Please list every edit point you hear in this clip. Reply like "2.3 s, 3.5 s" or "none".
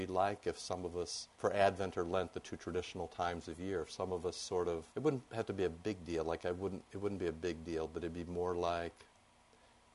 1.3 s, 4.9 s